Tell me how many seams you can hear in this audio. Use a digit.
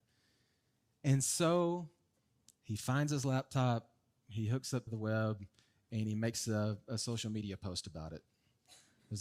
1